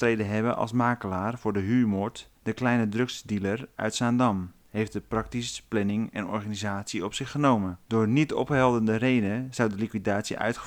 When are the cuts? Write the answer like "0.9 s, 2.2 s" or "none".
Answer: 2.4 s, 7.8 s